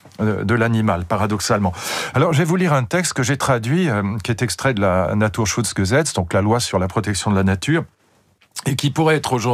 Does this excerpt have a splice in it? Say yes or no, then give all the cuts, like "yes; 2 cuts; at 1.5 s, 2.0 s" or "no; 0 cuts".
no; 0 cuts